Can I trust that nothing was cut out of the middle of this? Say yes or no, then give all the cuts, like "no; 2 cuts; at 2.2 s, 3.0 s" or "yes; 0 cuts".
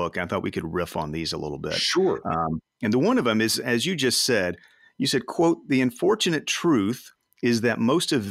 yes; 0 cuts